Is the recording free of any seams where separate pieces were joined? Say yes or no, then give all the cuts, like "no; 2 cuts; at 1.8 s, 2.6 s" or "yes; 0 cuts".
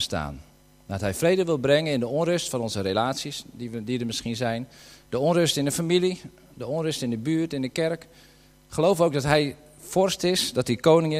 yes; 0 cuts